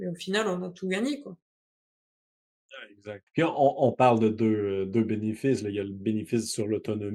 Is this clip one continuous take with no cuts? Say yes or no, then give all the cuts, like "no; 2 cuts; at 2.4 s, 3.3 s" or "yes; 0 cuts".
no; 1 cut; at 3.3 s